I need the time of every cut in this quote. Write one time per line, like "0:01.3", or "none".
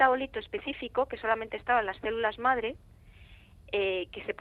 none